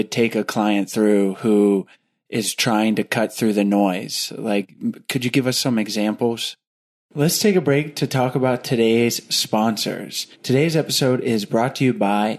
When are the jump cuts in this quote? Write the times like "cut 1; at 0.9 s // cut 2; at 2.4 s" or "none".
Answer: cut 1; at 10.3 s